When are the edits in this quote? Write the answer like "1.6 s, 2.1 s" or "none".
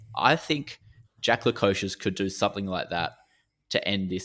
none